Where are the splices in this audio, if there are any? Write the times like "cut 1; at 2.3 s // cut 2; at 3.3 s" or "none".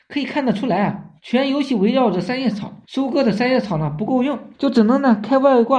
cut 1; at 1.2 s // cut 2; at 2.8 s // cut 3; at 4.5 s